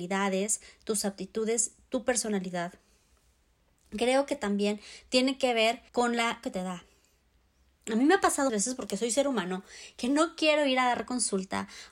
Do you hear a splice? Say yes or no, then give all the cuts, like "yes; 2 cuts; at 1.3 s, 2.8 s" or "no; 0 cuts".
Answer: yes; 3 cuts; at 5.9 s, 6.4 s, 8.5 s